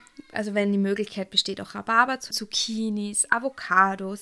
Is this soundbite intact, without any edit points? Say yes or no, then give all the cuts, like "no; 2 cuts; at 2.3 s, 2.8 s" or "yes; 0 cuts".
no; 1 cut; at 2.3 s